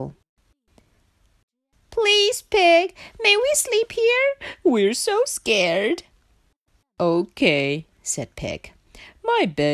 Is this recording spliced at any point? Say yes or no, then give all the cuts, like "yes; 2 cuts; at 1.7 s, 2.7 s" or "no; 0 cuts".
no; 0 cuts